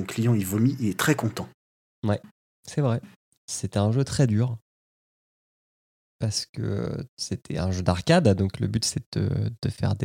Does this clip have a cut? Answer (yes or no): no